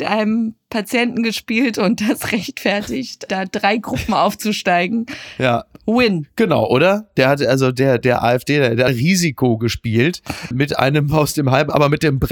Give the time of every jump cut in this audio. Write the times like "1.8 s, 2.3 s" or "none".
8.9 s, 10.5 s